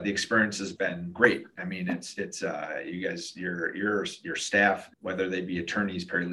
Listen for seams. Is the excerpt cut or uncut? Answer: cut